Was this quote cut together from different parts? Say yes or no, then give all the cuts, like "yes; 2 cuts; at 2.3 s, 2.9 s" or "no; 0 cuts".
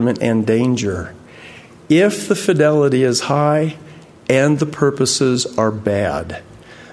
no; 0 cuts